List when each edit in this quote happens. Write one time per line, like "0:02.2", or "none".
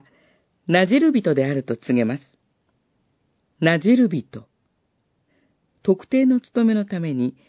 none